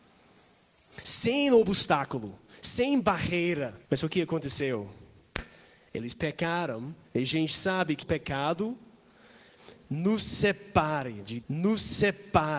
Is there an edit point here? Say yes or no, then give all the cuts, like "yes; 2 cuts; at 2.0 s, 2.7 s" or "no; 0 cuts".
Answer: yes; 4 cuts; at 3.8 s, 7.0 s, 8.0 s, 11.4 s